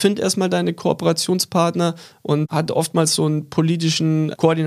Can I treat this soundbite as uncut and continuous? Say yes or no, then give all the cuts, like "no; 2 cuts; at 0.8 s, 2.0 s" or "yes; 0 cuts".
yes; 0 cuts